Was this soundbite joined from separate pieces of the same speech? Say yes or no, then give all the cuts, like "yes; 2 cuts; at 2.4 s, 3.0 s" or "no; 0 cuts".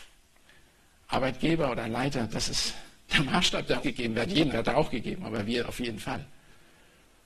yes; 2 cuts; at 3.8 s, 4.5 s